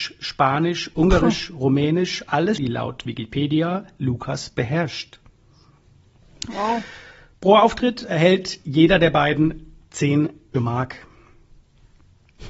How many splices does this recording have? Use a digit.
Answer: 3